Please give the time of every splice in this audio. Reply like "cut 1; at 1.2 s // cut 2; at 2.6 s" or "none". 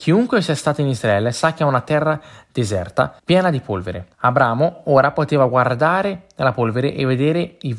cut 1; at 3.2 s // cut 2; at 4.1 s